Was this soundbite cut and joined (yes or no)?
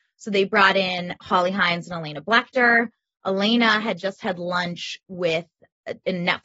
no